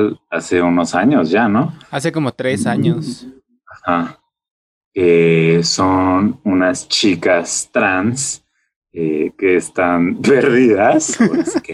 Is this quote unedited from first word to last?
yes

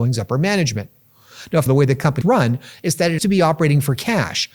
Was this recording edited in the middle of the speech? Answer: yes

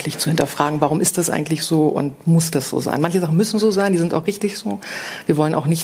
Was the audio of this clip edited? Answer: no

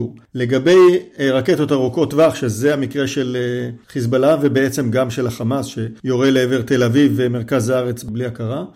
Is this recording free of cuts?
yes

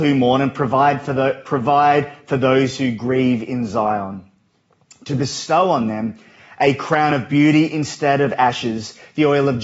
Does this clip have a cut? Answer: no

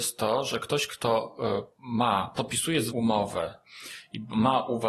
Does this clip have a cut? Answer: yes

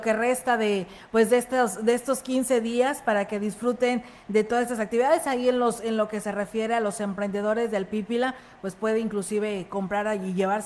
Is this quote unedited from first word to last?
yes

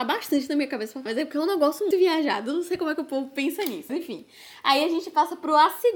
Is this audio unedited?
no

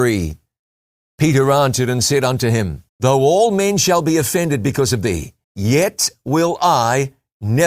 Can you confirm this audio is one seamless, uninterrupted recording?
no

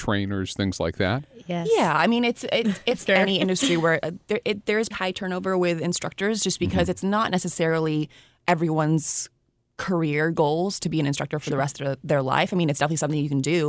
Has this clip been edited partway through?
yes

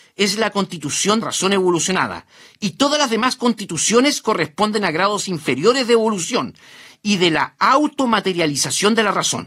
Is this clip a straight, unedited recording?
no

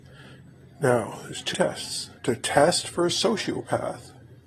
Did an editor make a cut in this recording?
yes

